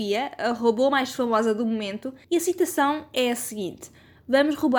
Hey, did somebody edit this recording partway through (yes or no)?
yes